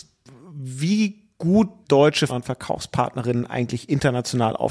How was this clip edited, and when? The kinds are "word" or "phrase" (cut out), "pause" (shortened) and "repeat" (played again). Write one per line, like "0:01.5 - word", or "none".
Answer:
0:01.8 - word
0:02.3 - word

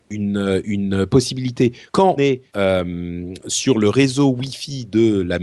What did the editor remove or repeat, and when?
0:02.2 - word
0:02.5 - pause

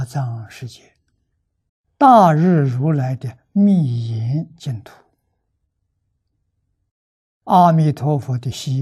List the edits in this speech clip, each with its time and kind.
0:01.7 - pause

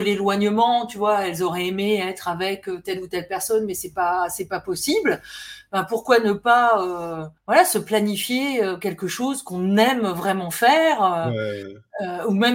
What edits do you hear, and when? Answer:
0:07.4 - pause

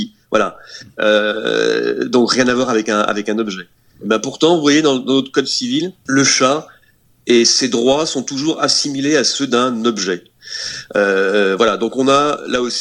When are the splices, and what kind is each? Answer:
none

